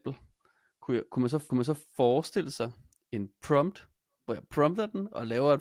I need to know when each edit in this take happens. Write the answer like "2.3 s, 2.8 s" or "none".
1.5 s